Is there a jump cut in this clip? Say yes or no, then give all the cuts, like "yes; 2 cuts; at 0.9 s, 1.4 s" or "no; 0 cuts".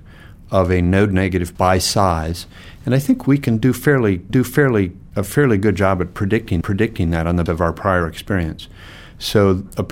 yes; 4 cuts; at 1.6 s, 4.3 s, 6.6 s, 7.5 s